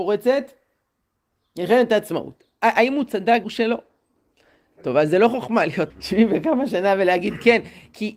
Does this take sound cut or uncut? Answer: cut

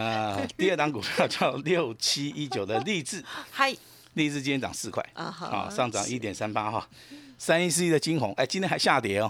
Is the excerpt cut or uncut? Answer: uncut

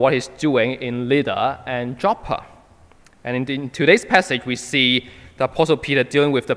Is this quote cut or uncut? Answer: uncut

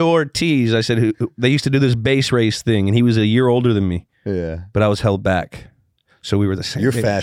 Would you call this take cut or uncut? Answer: uncut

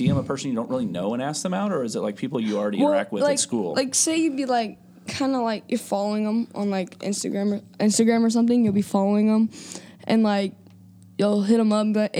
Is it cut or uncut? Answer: uncut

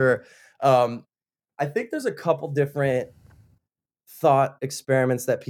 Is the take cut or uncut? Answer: uncut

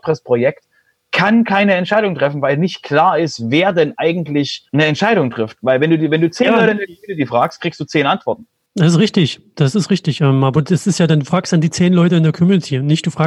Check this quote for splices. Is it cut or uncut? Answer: cut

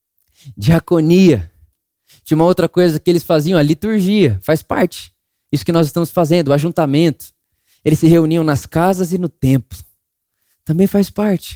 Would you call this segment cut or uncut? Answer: uncut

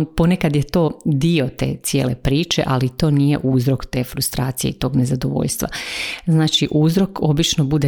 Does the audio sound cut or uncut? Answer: uncut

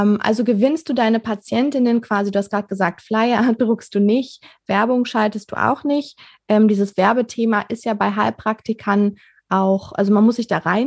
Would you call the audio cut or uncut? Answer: uncut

